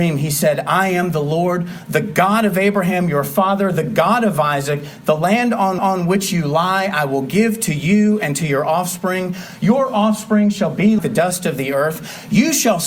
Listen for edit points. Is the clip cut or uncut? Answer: cut